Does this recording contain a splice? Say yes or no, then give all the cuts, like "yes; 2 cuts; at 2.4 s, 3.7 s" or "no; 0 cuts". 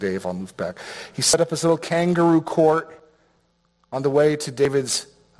no; 0 cuts